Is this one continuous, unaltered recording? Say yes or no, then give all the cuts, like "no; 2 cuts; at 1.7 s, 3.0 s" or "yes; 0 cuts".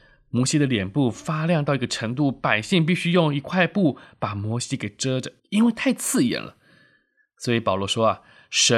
no; 1 cut; at 5.4 s